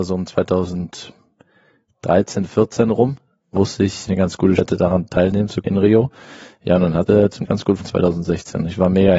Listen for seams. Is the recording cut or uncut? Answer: cut